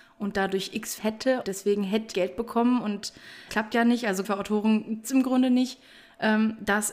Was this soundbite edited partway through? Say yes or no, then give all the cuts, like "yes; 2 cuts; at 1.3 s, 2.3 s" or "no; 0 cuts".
yes; 6 cuts; at 1.0 s, 1.4 s, 2.1 s, 3.5 s, 4.2 s, 5.0 s